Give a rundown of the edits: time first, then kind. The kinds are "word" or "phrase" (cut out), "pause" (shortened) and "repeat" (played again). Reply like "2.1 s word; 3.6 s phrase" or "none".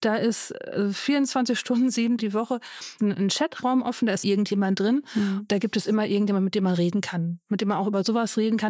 2.2 s word; 3.0 s word; 4.2 s word